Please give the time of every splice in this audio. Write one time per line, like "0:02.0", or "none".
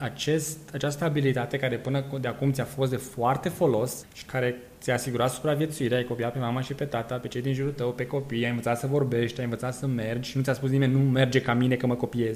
0:04.0